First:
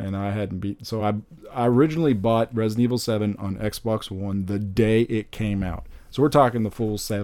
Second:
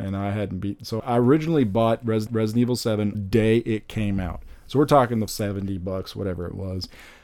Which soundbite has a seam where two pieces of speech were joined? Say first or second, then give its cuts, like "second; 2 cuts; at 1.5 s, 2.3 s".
second; 4 cuts; at 1.0 s, 2.3 s, 3.1 s, 5.3 s